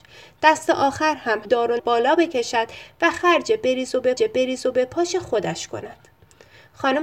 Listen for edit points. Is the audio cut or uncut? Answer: cut